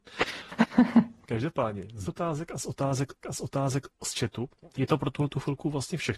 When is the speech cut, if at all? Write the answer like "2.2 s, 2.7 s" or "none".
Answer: 2.0 s, 3.2 s, 4.6 s